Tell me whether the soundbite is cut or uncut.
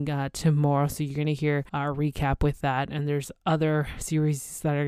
cut